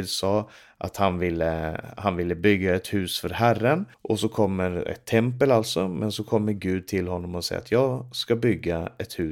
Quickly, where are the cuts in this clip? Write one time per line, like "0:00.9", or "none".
0:03.9

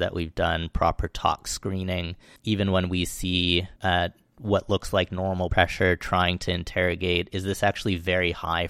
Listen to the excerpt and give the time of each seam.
0:02.4
0:03.8
0:05.5

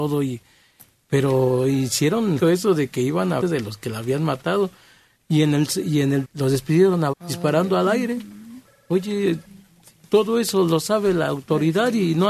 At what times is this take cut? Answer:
0:02.4
0:03.4
0:06.2
0:07.1

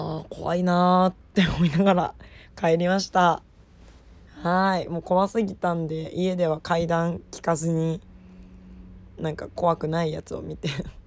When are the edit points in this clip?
none

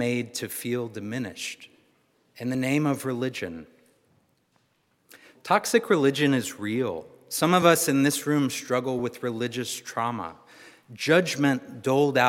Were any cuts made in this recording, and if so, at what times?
none

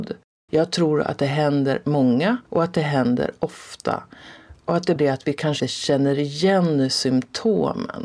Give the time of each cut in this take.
0:02.4
0:05.0
0:05.6

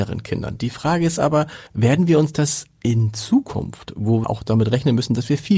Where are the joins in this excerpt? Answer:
0:01.7
0:04.2

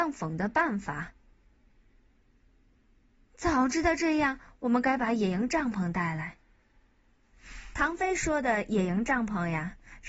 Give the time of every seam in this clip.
none

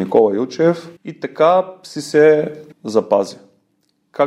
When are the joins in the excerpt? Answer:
0:01.0
0:02.7

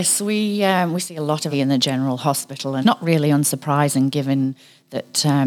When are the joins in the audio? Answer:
0:01.5
0:02.8

